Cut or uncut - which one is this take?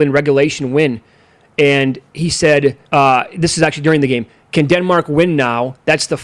cut